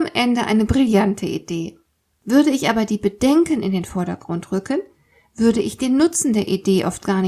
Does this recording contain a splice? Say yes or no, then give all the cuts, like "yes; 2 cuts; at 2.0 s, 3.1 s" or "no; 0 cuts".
no; 0 cuts